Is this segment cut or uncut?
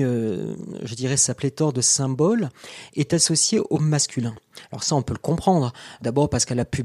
uncut